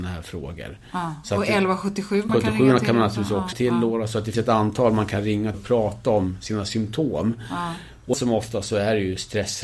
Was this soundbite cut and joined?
yes; 5 cuts; at 2.3 s, 3.5 s, 4.3 s, 5.5 s, 8.1 s

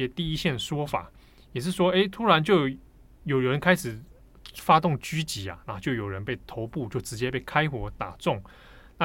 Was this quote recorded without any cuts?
yes; 0 cuts

